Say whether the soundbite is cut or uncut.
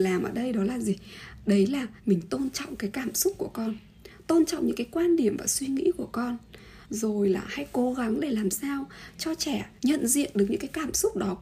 cut